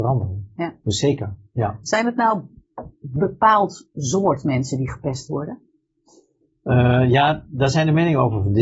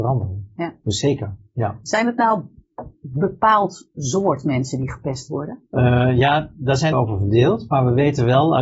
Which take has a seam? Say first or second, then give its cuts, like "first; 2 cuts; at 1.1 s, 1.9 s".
second; 2 cuts; at 5.7 s, 6.9 s